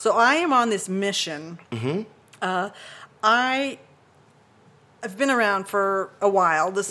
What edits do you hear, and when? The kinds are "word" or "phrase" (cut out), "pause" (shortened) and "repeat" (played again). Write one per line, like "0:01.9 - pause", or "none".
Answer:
none